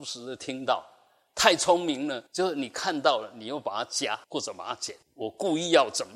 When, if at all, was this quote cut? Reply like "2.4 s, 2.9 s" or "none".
2.3 s, 4.2 s, 5.0 s

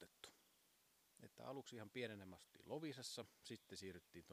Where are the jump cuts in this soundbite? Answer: none

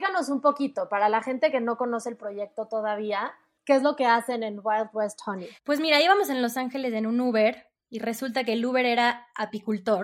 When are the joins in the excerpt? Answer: 5.6 s

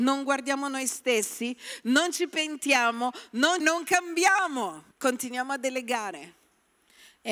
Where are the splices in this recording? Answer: 3.6 s, 4.9 s

